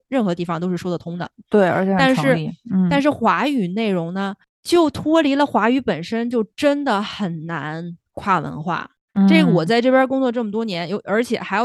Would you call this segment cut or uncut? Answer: uncut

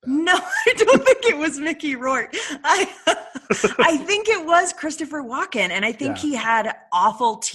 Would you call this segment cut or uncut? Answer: uncut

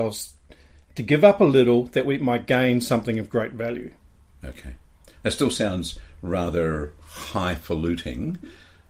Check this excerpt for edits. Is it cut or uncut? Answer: uncut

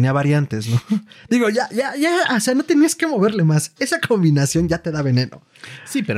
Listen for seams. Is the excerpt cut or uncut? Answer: uncut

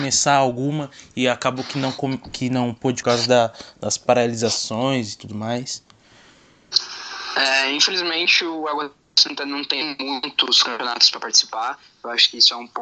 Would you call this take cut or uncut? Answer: cut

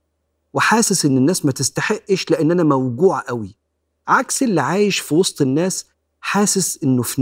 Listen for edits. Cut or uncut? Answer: uncut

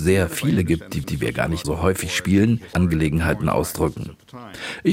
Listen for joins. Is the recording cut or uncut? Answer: cut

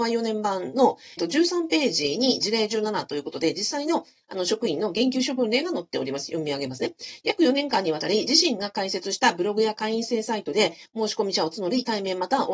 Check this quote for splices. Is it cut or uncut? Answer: cut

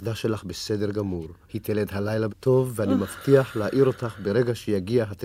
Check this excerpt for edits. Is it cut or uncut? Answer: cut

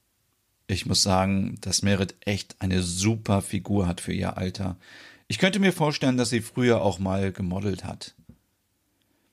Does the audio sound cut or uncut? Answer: uncut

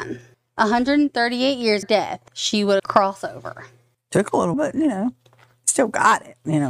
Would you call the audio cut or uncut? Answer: cut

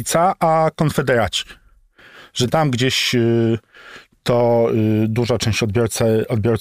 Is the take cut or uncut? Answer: uncut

